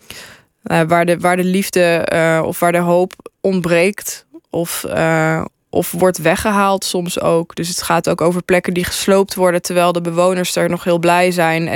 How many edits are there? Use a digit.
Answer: 1